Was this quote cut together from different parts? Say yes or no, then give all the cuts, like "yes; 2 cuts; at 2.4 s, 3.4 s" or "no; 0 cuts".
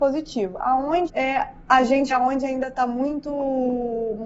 yes; 2 cuts; at 1.1 s, 2.1 s